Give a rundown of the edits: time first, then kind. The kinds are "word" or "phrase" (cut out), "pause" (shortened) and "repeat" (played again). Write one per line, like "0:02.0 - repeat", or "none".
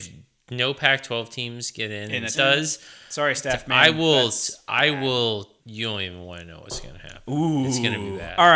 0:02.3 - phrase
0:05.6 - pause